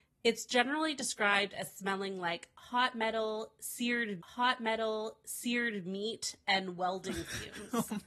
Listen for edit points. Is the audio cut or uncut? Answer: cut